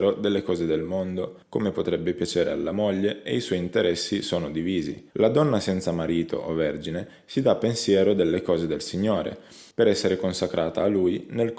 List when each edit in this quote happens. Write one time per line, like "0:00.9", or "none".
0:01.4
0:05.1
0:09.7